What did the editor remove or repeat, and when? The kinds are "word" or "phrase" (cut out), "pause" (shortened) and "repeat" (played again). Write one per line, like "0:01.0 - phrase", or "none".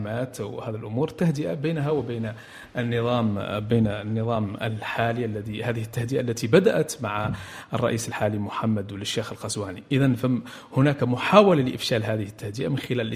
none